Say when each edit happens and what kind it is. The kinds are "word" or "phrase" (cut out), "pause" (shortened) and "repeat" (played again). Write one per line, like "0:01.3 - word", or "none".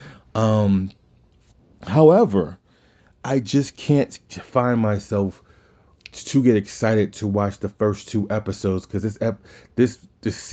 none